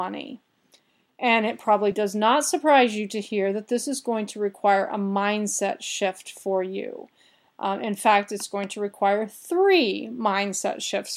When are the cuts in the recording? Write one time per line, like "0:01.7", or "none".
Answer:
none